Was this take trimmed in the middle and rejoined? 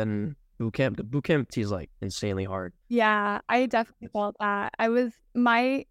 yes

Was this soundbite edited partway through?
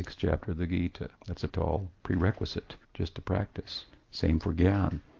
yes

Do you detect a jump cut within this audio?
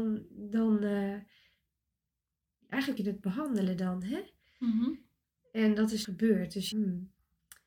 yes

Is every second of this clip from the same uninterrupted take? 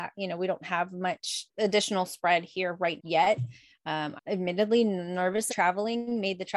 no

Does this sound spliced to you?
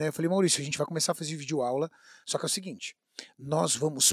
no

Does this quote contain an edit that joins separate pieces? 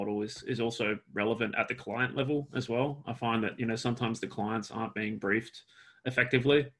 no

